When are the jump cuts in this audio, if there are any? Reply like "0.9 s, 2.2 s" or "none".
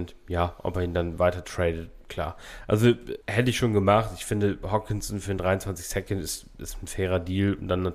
3.2 s